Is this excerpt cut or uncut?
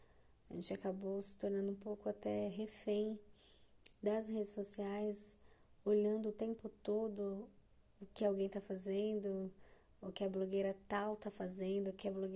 uncut